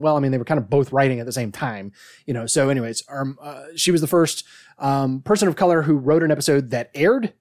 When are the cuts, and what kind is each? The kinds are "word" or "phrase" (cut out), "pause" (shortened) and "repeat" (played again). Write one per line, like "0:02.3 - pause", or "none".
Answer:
none